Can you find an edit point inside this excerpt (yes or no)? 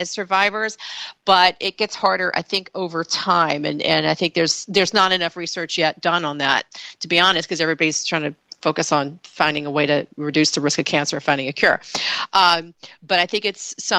no